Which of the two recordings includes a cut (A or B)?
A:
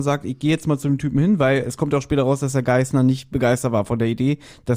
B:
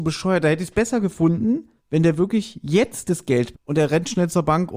B